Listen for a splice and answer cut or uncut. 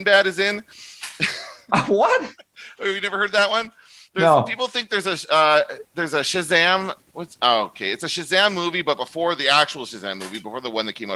uncut